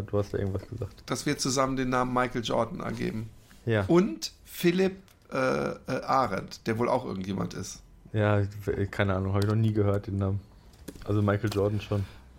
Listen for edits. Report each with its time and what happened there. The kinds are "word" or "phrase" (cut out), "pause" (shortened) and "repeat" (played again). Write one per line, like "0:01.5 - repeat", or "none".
none